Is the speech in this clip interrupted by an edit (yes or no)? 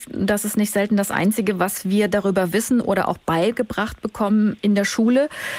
no